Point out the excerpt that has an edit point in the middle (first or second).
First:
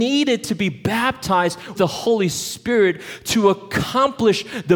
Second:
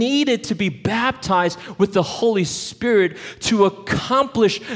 first